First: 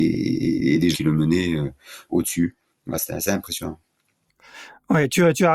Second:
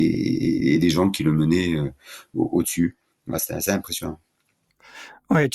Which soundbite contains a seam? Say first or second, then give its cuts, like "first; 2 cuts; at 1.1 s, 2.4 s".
first; 2 cuts; at 0.9 s, 2.1 s